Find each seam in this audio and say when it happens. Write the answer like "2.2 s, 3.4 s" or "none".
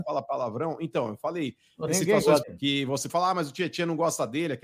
1.9 s, 2.4 s, 3.1 s